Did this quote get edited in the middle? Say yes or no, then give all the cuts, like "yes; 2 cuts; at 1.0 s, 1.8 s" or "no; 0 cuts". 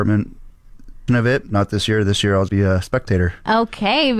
yes; 3 cuts; at 1.1 s, 1.4 s, 2.5 s